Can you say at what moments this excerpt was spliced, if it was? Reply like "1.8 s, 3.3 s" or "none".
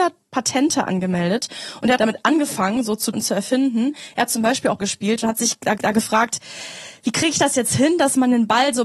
2.0 s, 3.1 s, 4.8 s, 5.8 s